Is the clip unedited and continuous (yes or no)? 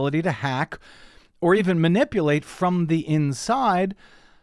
yes